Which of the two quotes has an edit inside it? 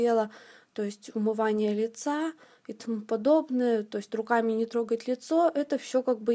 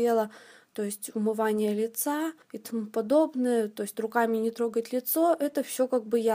second; 1 cut; at 2.4 s

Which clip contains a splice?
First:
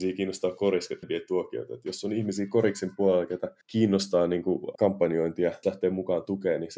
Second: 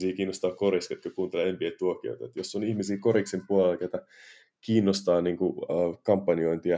first; 4 cuts; at 1.0 s, 3.6 s, 4.7 s, 5.6 s

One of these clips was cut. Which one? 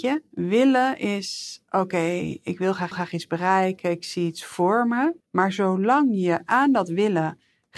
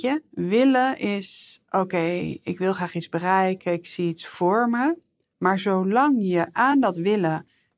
first; 2 cuts; at 2.9 s, 5.2 s

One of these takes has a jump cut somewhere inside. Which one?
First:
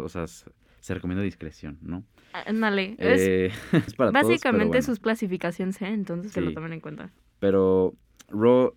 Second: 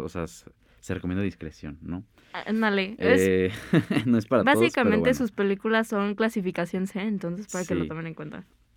first; 3 cuts; at 3.9 s, 5.0 s, 6.3 s

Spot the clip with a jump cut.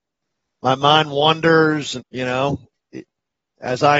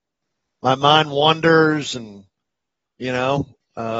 first; 2 cuts; at 2.0 s, 2.8 s

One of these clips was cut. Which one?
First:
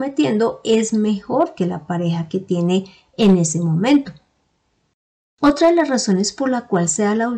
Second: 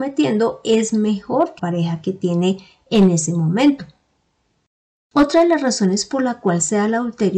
second; 1 cut; at 1.6 s

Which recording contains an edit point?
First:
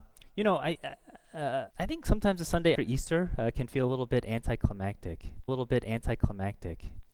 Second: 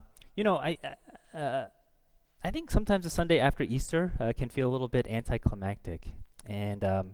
first; 3 cuts; at 1.7 s, 2.7 s, 5.5 s

